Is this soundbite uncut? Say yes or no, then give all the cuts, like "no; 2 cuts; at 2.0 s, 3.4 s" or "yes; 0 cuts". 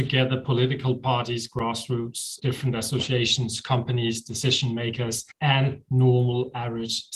no; 2 cuts; at 2.4 s, 5.3 s